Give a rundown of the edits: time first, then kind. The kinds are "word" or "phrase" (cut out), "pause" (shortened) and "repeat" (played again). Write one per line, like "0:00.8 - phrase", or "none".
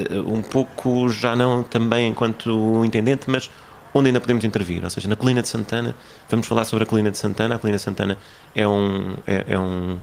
none